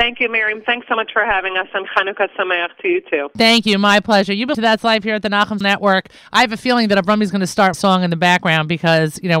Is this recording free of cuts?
no; 3 cuts; at 4.5 s, 5.6 s, 7.7 s

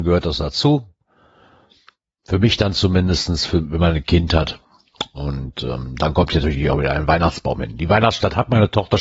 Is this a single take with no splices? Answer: yes; 0 cuts

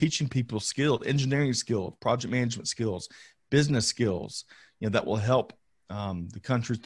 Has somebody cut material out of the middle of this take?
no; 0 cuts

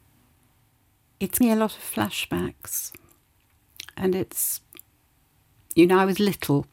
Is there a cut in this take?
yes; 1 cut; at 1.4 s

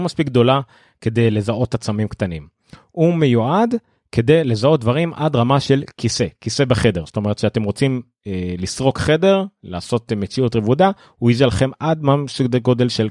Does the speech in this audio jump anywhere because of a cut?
no; 0 cuts

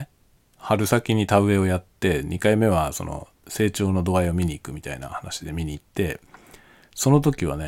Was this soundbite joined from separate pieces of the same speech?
yes; 2 cuts; at 3.4 s, 5.9 s

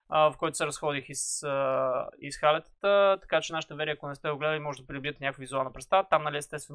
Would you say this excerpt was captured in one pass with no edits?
yes; 0 cuts

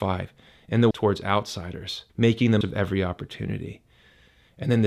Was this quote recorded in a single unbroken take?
no; 3 cuts; at 0.9 s, 2.1 s, 2.6 s

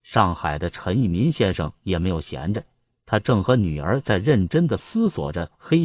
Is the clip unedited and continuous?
yes; 0 cuts

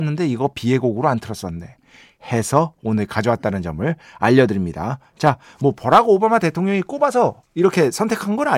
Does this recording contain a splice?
no; 0 cuts

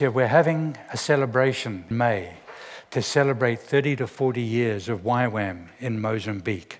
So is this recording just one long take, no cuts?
no; 1 cut; at 1.9 s

